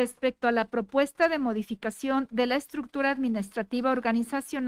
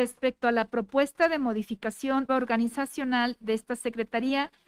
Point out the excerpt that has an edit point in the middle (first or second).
second